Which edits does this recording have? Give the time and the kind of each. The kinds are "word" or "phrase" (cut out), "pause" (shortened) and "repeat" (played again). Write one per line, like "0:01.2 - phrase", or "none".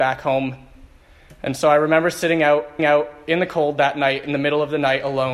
0:02.8 - repeat